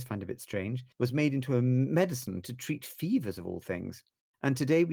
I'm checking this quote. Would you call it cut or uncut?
cut